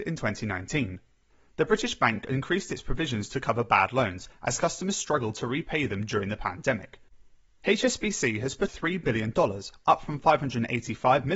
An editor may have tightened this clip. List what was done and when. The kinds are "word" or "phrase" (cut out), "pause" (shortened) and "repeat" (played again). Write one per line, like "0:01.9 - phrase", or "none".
0:08.7 - word